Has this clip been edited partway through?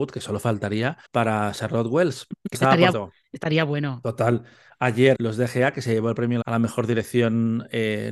yes; 5 cuts; at 1.0 s, 2.5 s, 2.9 s, 5.1 s, 6.4 s

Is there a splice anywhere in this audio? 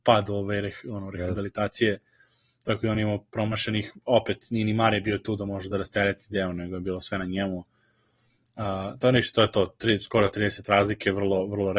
no; 0 cuts

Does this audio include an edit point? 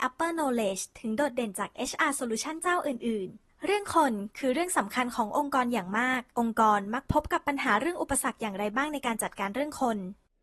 no; 0 cuts

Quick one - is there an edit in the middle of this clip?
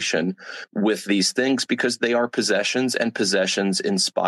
no; 0 cuts

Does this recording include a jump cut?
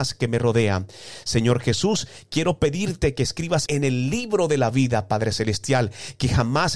yes; 1 cut; at 3.7 s

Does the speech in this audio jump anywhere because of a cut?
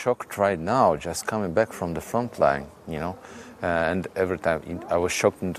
no; 0 cuts

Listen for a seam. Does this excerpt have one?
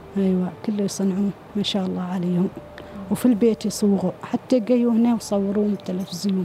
no; 0 cuts

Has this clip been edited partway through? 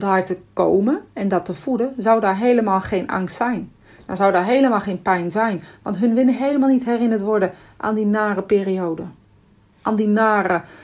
no; 0 cuts

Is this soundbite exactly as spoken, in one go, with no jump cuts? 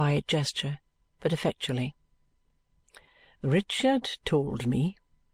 yes; 0 cuts

